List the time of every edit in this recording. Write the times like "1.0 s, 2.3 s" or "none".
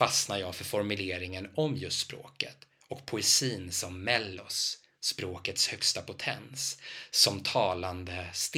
none